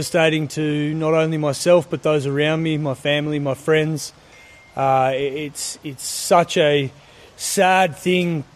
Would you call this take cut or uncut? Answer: uncut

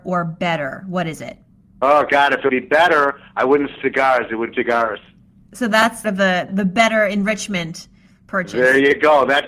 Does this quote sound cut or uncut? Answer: cut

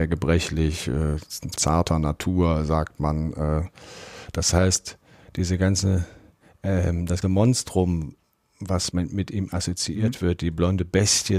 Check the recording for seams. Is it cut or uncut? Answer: cut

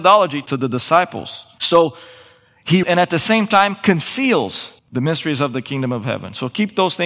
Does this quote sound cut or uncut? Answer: cut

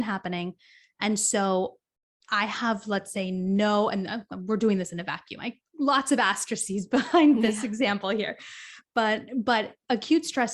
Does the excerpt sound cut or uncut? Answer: uncut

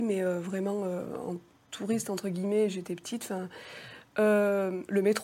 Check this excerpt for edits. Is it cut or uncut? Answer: uncut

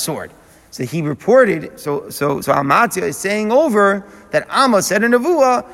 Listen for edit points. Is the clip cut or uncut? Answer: uncut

